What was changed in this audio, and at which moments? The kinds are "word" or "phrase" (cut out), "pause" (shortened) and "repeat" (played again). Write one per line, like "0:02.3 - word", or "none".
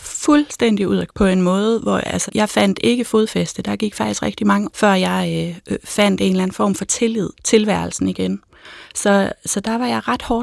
0:01.1 - word
0:02.3 - word
0:04.7 - word
0:07.3 - word